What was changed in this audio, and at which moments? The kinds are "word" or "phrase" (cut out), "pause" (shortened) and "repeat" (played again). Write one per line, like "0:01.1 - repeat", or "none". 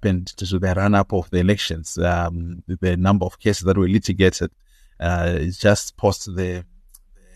none